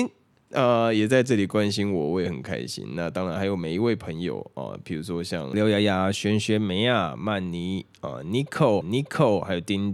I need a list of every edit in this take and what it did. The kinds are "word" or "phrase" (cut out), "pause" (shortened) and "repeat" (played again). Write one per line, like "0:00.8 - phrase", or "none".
0:08.8 - repeat